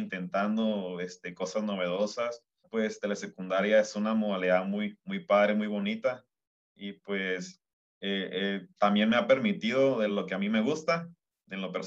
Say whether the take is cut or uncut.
uncut